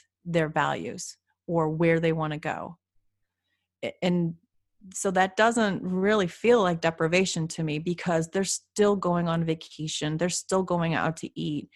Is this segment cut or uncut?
uncut